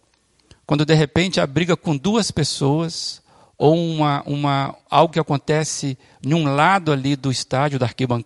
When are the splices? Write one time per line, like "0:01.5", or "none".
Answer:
none